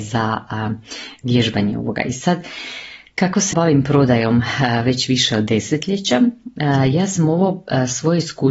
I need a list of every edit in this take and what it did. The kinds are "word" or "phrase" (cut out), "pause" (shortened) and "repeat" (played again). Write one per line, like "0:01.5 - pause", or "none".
0:03.5 - word